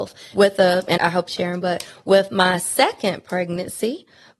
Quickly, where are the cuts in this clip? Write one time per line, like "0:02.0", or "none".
0:01.0
0:01.3